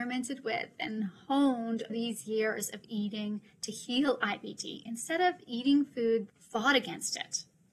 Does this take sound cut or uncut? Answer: cut